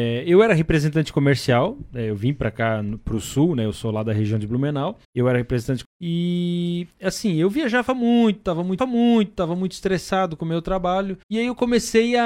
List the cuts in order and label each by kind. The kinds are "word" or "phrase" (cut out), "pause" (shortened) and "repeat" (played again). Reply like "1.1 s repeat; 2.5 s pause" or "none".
5.0 s pause; 5.8 s word; 6.9 s pause; 8.8 s repeat; 11.2 s pause